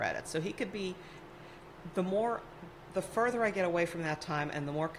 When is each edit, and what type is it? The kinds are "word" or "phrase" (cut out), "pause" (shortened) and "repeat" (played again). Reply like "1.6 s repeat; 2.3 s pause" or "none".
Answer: none

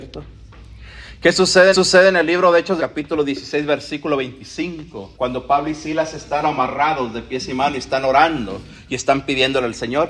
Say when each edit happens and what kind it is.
1.7 s repeat; 2.8 s phrase; 5.1 s pause; 6.4 s phrase

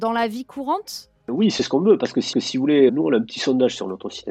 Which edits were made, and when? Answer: 2.3 s repeat; 2.9 s word

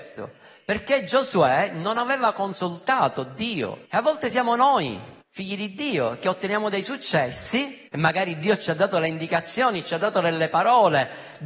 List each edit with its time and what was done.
3.8 s pause; 5.2 s pause; 7.9 s pause

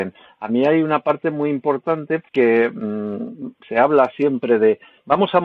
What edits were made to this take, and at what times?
2.3 s pause; 3.6 s word

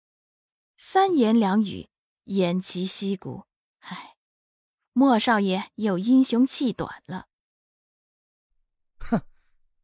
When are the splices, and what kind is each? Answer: none

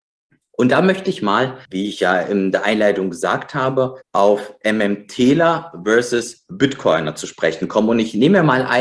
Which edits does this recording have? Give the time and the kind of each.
1.7 s pause; 4.0 s pause

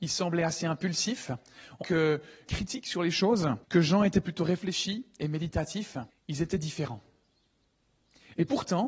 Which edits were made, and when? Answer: 1.8 s word; 2.5 s phrase; 3.6 s pause; 6.1 s pause

